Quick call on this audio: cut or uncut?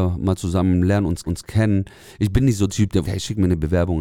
cut